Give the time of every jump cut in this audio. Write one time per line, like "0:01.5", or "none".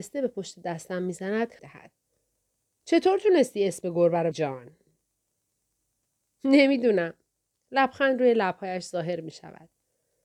0:01.6
0:04.3